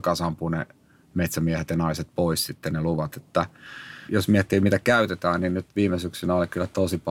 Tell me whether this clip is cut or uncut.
cut